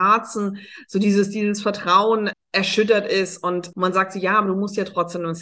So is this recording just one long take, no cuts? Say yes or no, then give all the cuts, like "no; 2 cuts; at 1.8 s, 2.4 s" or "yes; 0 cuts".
no; 2 cuts; at 2.3 s, 3.7 s